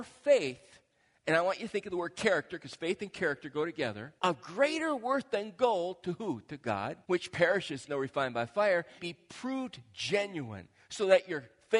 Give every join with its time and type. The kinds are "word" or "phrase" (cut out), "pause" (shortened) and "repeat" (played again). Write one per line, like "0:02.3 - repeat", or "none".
0:04.2 - pause
0:07.0 - pause
0:07.9 - word
0:09.0 - word